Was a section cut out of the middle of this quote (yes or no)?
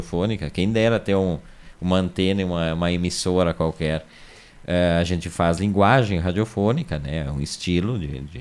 no